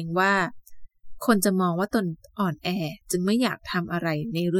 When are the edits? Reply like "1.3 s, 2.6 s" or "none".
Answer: 3.0 s